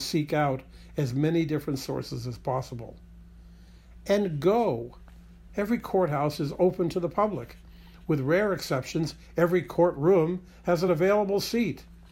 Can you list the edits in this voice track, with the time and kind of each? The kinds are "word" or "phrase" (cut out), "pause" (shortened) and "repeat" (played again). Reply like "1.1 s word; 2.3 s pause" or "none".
none